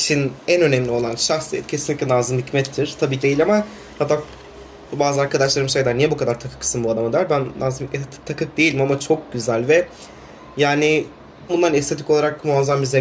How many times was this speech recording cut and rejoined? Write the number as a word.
two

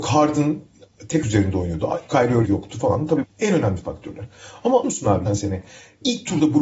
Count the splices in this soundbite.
five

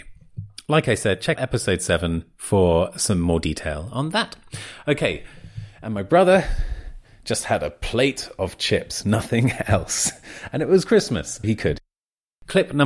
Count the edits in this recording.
two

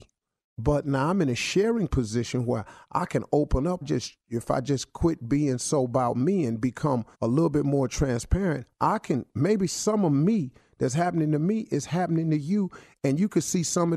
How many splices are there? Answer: two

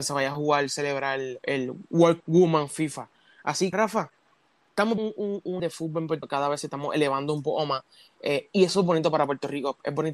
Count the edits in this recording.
six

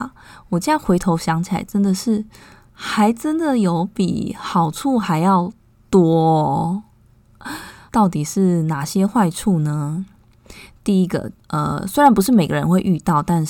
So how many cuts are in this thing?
zero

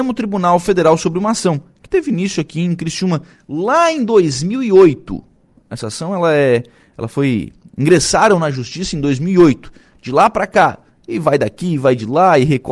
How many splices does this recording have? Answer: zero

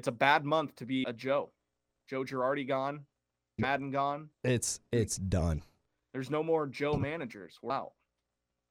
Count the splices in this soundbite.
three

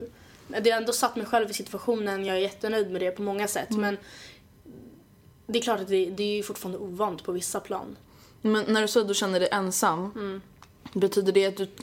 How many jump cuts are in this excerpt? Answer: zero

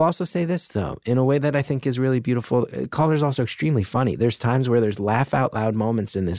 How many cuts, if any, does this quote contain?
zero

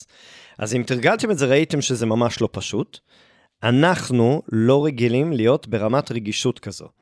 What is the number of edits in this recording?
zero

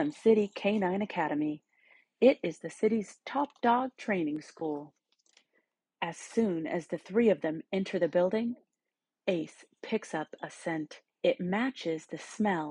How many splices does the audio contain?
one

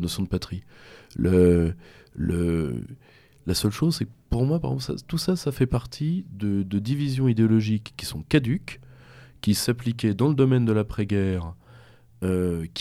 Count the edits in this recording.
zero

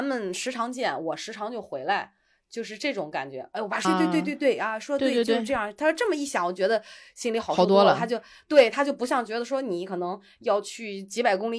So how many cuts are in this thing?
one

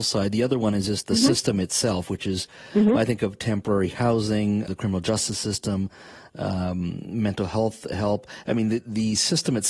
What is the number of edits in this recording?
one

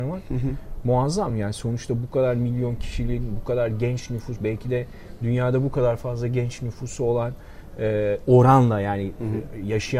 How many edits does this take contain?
zero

